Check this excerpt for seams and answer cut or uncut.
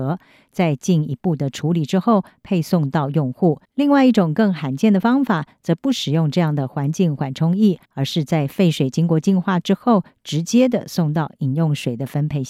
cut